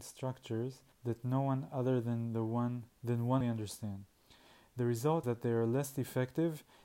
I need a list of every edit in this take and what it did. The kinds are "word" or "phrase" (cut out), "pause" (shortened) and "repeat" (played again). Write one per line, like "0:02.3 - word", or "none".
0:00.9 - pause
0:02.9 - pause
0:03.4 - phrase
0:05.2 - word